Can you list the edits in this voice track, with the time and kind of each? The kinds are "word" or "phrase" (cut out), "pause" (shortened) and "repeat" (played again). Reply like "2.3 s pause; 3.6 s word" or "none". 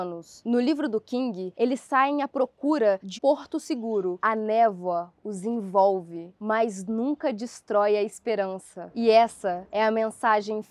3.1 s word